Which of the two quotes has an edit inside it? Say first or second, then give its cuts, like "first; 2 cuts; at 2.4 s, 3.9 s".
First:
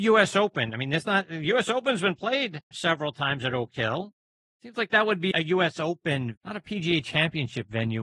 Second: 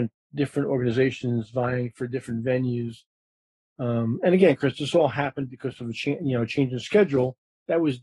first; 3 cuts; at 2.7 s, 5.3 s, 6.4 s